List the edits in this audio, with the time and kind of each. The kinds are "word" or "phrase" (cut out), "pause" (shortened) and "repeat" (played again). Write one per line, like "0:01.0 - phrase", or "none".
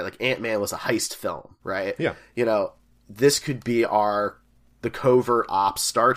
0:01.6 - pause